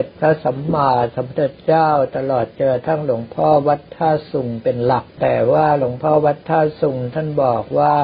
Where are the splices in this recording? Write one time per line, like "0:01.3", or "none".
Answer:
0:05.1